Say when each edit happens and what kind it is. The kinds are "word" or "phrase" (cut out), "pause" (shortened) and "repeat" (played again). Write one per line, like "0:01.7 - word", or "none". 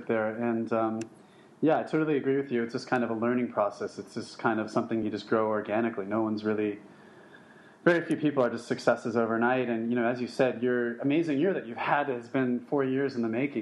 none